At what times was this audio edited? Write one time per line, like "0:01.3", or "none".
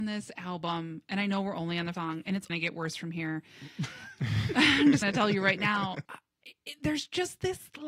0:01.9
0:02.5
0:05.0
0:06.1